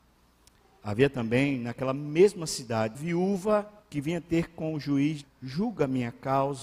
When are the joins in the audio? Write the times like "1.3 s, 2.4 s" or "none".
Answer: 2.9 s, 3.8 s, 5.2 s